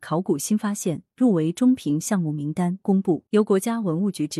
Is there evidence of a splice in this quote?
yes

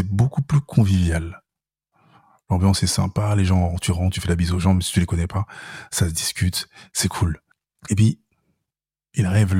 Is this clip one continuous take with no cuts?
yes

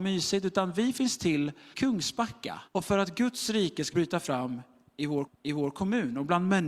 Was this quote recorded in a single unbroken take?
no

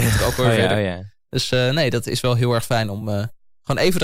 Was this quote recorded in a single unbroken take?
yes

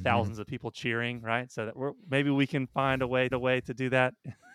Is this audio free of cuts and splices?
no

